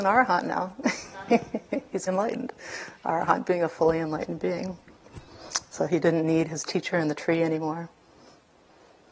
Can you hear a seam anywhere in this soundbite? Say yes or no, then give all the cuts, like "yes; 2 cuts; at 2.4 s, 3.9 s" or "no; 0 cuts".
yes; 1 cut; at 2.1 s